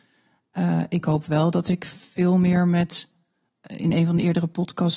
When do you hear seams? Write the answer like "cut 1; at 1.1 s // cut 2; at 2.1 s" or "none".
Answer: none